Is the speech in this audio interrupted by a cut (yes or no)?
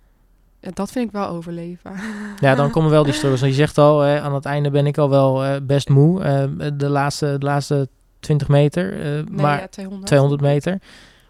no